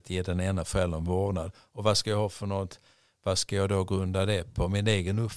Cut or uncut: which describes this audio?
uncut